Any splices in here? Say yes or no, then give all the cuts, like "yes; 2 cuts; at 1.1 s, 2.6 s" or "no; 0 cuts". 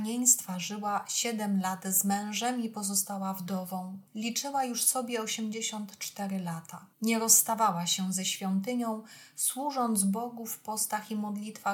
yes; 2 cuts; at 4.1 s, 6.9 s